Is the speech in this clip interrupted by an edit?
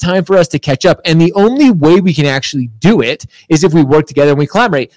no; 0 cuts

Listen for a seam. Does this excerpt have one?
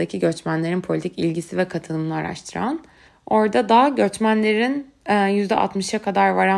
yes; 1 cut; at 3.1 s

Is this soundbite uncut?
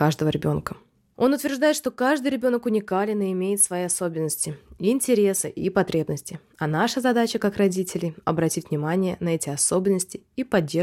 yes; 0 cuts

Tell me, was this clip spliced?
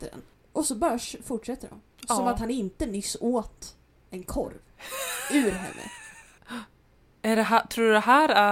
no; 0 cuts

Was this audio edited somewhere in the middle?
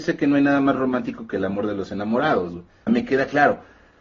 yes; 1 cut; at 2.9 s

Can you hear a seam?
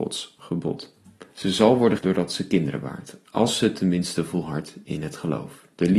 yes; 2 cuts; at 1.3 s, 2.0 s

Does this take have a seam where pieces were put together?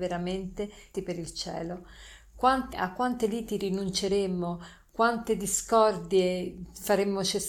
yes; 2 cuts; at 0.9 s, 2.7 s

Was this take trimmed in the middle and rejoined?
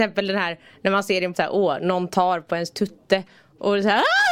yes; 1 cut; at 1.3 s

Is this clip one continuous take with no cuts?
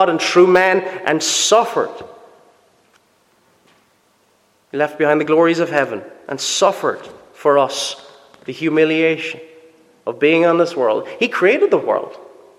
yes; 0 cuts

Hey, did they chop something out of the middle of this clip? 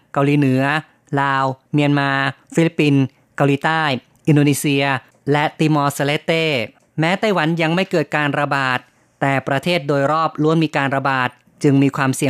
no; 0 cuts

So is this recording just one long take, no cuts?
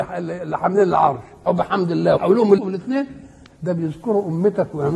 no; 3 cuts; at 1.5 s, 2.2 s, 2.6 s

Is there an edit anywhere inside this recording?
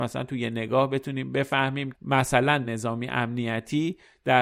yes; 2 cuts; at 1.9 s, 2.6 s

